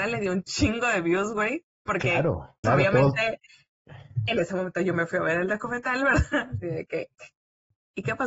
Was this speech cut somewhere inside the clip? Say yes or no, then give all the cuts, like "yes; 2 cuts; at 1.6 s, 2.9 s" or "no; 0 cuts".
yes; 1 cut; at 2.6 s